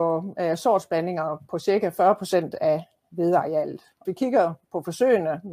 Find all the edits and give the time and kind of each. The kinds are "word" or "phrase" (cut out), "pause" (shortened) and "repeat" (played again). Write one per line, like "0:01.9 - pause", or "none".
0:04.0 - word